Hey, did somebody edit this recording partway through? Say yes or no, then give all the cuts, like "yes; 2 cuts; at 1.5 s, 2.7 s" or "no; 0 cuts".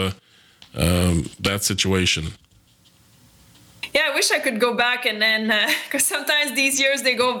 no; 0 cuts